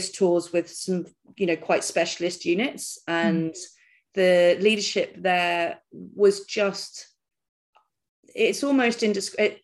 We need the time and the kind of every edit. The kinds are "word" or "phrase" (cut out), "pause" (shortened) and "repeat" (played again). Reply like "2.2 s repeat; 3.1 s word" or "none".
none